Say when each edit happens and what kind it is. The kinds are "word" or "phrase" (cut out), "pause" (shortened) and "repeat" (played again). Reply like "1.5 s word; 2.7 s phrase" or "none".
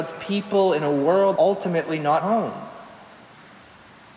1.4 s word; 2.2 s word